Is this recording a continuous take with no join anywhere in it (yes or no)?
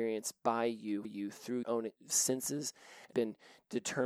no